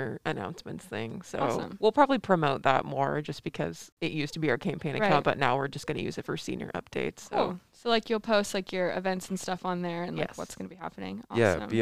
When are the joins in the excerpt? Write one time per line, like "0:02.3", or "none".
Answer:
none

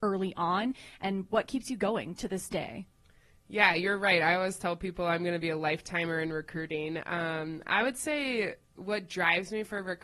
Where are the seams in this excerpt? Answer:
none

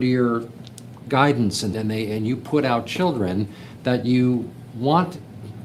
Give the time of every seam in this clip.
0:01.7

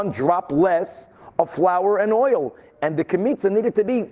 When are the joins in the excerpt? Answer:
none

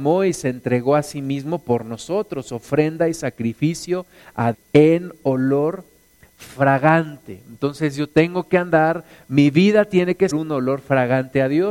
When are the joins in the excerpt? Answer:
0:04.5
0:10.3

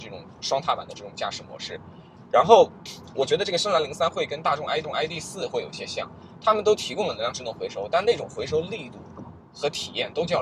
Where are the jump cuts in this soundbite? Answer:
0:04.8

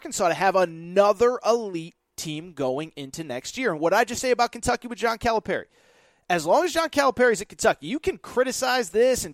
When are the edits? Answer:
none

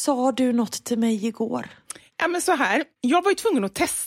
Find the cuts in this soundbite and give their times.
none

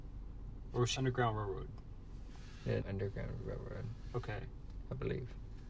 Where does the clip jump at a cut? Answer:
0:01.0
0:02.8

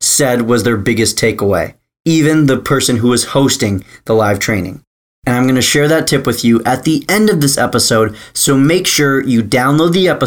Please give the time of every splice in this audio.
none

